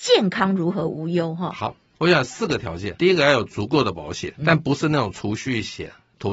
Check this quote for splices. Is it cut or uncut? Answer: cut